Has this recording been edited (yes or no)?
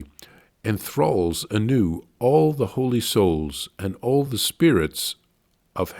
no